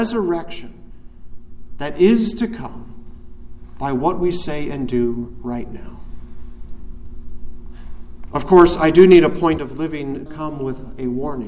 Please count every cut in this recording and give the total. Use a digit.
2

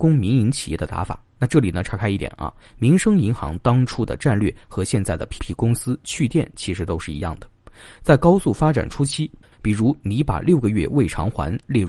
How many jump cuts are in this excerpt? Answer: 1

